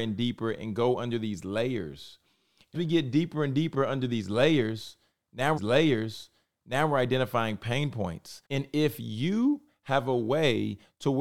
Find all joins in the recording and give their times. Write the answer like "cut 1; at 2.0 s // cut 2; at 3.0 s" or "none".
cut 1; at 2.7 s // cut 2; at 5.6 s // cut 3; at 8.4 s